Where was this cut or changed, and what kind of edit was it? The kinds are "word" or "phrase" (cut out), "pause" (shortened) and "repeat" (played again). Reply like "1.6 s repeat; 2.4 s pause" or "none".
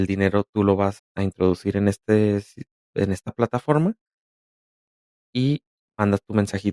1.0 s word; 2.9 s word